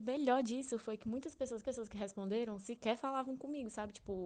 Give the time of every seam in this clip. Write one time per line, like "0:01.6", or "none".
0:01.6